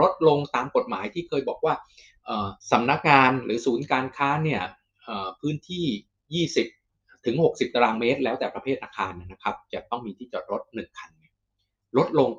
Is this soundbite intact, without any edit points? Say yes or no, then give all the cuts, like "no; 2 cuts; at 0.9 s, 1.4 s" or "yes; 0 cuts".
no; 1 cut; at 2.6 s